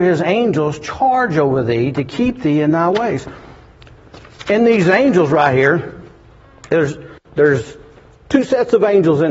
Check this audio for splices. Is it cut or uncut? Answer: uncut